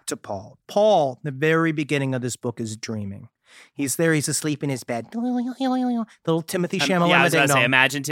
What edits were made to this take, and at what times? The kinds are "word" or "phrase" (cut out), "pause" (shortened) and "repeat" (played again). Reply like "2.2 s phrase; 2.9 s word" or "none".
none